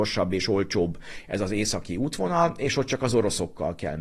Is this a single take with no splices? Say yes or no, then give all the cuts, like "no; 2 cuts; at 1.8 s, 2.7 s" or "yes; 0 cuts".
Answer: yes; 0 cuts